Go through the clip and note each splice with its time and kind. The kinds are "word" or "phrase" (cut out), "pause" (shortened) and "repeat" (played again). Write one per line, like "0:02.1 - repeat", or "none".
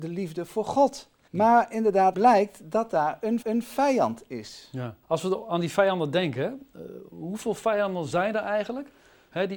0:01.3 - pause
0:02.1 - word
0:03.4 - repeat
0:05.0 - pause